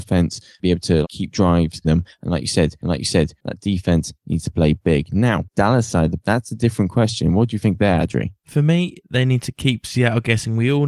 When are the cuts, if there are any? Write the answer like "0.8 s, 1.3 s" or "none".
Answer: 1.0 s, 1.8 s, 2.8 s, 6.2 s